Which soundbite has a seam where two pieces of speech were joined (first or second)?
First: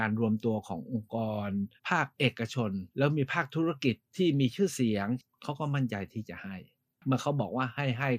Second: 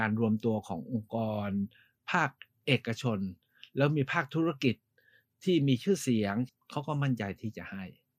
first